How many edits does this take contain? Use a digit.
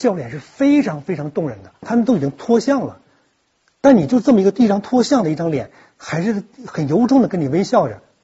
0